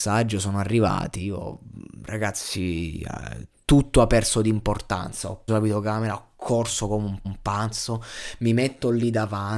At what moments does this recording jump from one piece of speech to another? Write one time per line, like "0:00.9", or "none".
0:05.5
0:07.2